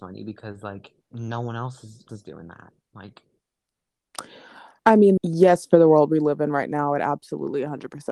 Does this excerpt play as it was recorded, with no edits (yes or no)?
no